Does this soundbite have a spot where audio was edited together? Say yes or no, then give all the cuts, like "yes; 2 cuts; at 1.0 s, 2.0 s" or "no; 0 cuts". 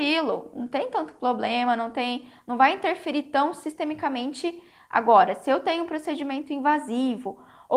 no; 0 cuts